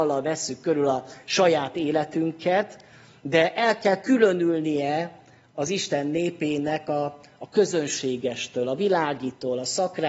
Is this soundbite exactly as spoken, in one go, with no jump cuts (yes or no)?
yes